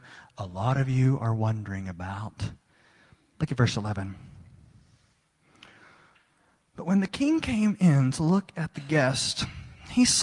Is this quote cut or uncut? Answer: uncut